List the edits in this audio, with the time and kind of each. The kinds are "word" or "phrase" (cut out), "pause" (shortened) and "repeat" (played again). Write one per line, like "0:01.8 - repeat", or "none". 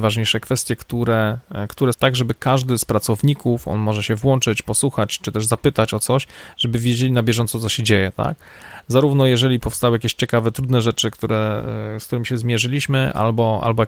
0:01.9 - phrase